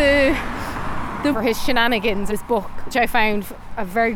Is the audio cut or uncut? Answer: cut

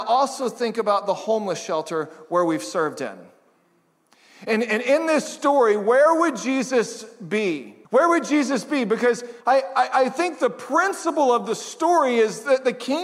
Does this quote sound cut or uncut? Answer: cut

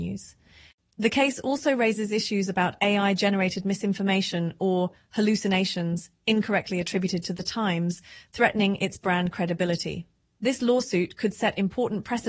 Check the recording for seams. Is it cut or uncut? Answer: uncut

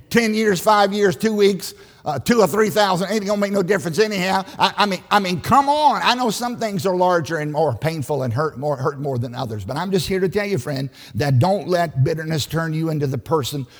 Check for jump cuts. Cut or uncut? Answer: uncut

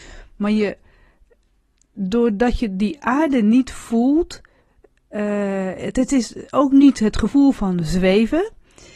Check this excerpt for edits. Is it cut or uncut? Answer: uncut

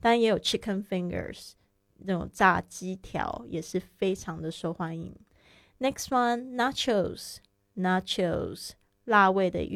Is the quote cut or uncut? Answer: uncut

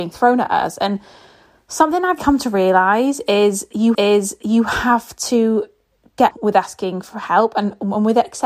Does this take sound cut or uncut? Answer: cut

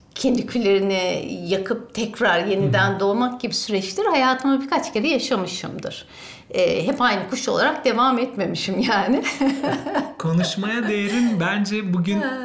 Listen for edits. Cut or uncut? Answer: uncut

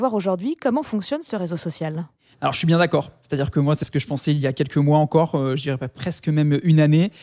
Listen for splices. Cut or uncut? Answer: cut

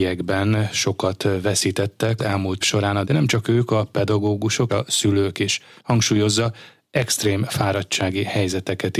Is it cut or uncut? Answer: cut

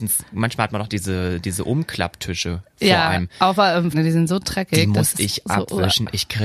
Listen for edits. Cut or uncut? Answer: cut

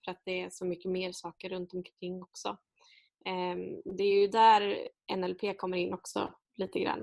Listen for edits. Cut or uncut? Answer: uncut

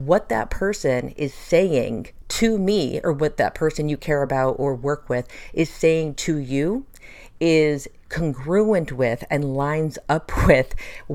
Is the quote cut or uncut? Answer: uncut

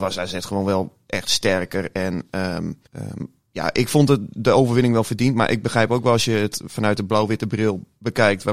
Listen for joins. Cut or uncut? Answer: cut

